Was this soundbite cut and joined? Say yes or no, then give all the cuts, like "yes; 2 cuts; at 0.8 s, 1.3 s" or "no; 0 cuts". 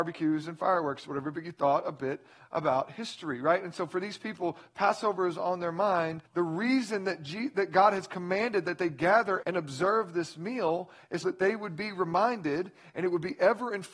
yes; 3 cuts; at 6.3 s, 9.4 s, 11.2 s